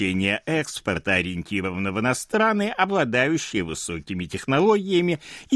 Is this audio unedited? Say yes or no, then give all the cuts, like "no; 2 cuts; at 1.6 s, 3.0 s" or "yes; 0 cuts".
yes; 0 cuts